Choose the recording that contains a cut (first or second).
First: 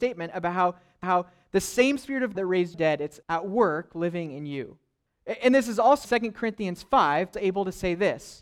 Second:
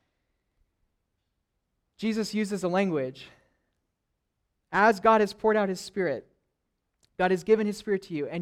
first